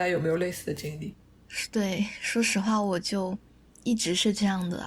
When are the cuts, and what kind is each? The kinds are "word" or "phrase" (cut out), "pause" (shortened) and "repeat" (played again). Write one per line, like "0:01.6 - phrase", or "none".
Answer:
none